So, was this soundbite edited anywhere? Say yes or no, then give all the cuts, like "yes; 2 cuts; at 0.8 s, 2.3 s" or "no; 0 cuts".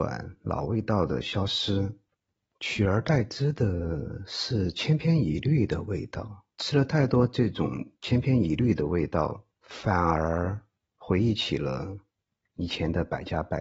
yes; 5 cuts; at 2.4 s, 6.5 s, 8.0 s, 9.5 s, 10.9 s